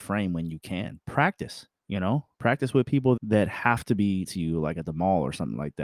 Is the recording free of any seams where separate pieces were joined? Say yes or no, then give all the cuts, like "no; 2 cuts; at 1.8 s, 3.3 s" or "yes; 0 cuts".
no; 4 cuts; at 1.8 s, 2.3 s, 3.2 s, 4.2 s